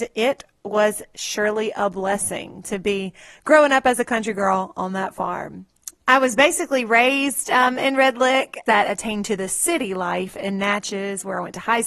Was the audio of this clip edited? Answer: yes; 1 cut; at 8.7 s

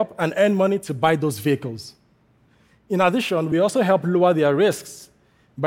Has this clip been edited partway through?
no; 0 cuts

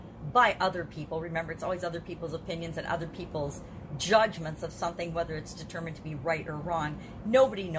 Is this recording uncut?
yes; 0 cuts

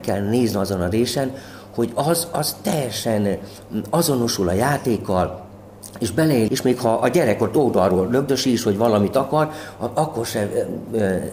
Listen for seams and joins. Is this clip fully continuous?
no; 1 cut; at 6.5 s

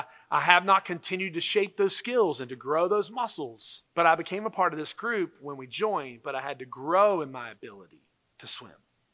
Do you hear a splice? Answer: yes; 2 cuts; at 3.9 s, 8.2 s

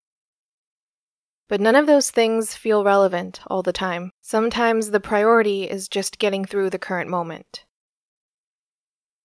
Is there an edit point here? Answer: yes; 1 cut; at 4.2 s

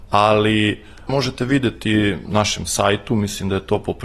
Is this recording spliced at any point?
yes; 2 cuts; at 1.1 s, 2.3 s

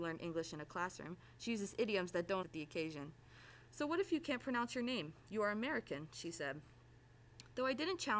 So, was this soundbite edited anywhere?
yes; 1 cut; at 2.4 s

